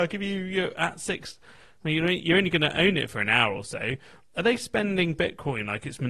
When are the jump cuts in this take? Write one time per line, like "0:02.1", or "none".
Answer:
none